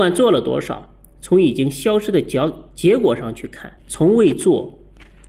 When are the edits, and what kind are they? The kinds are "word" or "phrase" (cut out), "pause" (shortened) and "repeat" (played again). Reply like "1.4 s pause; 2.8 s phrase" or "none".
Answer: 3.8 s pause